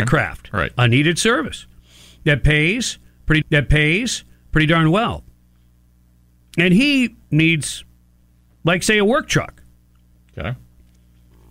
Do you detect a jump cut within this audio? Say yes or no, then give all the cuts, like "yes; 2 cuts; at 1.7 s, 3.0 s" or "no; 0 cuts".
yes; 1 cut; at 3.4 s